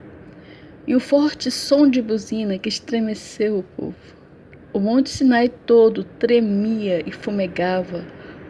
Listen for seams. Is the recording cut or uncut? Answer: cut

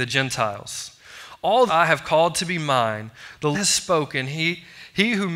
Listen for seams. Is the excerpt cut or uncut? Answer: cut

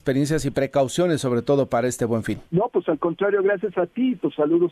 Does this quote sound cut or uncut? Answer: cut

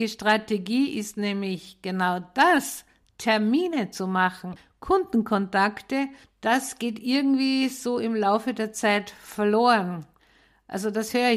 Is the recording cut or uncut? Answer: uncut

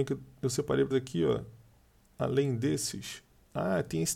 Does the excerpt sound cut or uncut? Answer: cut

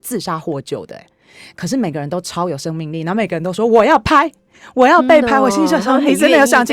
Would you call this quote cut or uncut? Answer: uncut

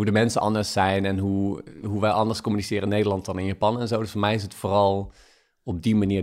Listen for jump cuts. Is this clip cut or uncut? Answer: uncut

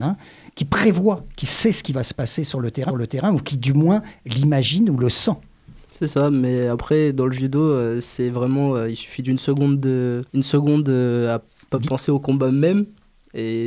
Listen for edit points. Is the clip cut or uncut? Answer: cut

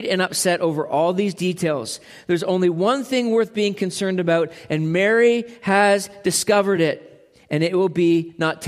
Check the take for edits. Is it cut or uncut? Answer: uncut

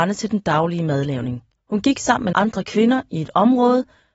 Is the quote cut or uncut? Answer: cut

